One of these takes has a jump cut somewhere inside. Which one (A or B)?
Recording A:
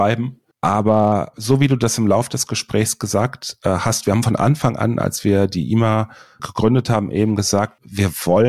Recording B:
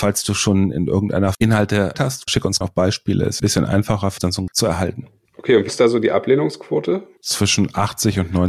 B